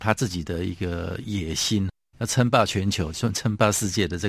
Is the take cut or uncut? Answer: uncut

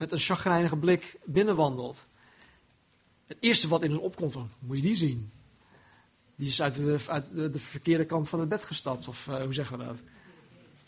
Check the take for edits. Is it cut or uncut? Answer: uncut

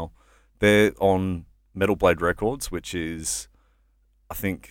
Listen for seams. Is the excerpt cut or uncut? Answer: uncut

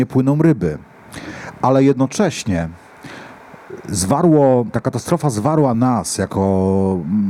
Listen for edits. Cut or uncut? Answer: uncut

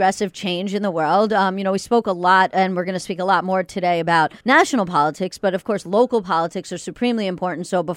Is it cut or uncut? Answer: cut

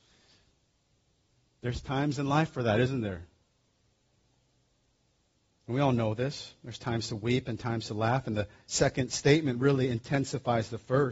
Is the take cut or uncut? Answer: uncut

